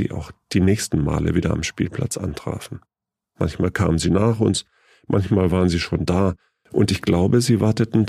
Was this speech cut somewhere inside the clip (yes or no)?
no